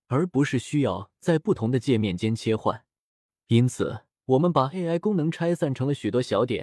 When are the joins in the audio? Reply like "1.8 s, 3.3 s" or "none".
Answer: 4.1 s